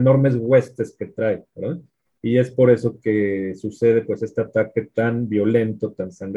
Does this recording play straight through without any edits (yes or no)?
yes